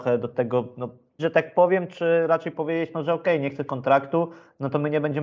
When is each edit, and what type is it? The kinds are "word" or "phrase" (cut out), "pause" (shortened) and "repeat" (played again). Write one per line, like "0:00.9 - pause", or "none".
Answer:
0:01.2 - word
0:03.7 - word